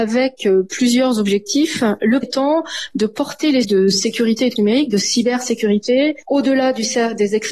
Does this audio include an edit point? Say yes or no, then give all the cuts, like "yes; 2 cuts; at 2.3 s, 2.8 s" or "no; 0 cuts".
yes; 3 cuts; at 2.2 s, 3.6 s, 4.6 s